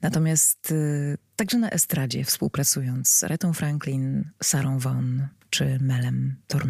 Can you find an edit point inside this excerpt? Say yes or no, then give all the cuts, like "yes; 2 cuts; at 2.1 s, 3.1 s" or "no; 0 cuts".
no; 0 cuts